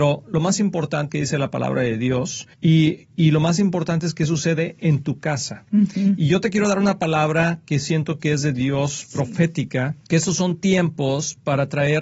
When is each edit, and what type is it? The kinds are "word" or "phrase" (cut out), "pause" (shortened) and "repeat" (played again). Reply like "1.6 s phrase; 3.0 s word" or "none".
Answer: 1.1 s word; 2.5 s pause; 10.0 s pause